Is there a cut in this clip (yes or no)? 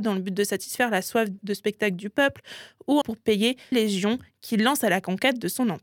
yes